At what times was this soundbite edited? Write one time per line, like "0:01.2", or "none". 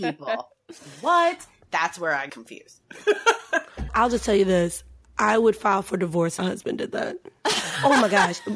0:02.3
0:03.9
0:06.4